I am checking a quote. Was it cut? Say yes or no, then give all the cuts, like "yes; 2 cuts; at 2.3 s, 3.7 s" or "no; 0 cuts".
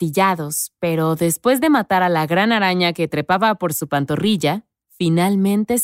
no; 0 cuts